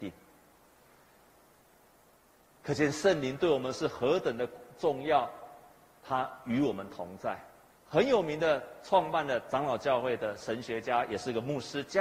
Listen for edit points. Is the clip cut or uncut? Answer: cut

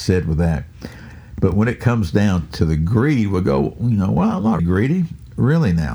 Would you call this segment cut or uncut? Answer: cut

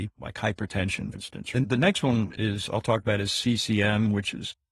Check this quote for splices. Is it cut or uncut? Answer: cut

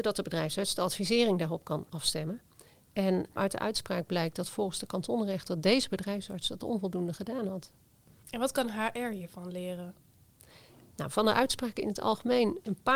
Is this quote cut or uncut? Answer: uncut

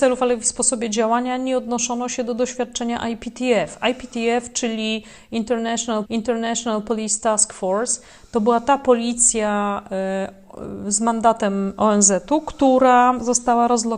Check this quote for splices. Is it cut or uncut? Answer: cut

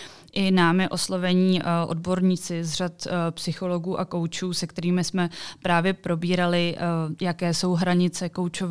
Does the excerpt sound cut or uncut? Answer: uncut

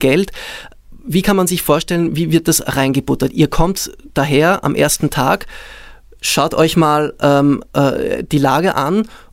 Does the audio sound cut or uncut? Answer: uncut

